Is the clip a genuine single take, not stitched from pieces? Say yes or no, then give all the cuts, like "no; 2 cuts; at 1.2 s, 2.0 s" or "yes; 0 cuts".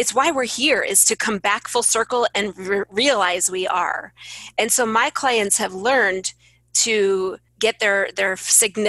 no; 1 cut; at 7.5 s